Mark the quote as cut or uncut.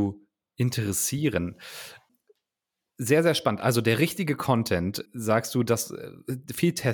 uncut